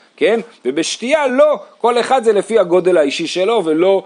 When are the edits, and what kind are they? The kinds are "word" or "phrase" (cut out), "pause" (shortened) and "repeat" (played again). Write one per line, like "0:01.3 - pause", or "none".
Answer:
none